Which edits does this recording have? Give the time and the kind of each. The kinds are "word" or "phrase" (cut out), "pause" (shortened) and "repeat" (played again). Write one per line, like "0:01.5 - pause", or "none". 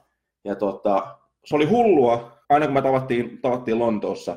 0:02.4 - pause